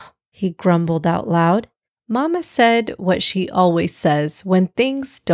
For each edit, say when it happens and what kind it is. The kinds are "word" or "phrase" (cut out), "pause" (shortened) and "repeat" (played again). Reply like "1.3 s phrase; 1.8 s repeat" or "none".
none